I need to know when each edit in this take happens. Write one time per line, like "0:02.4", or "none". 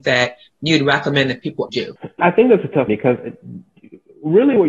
0:01.7
0:02.2
0:02.9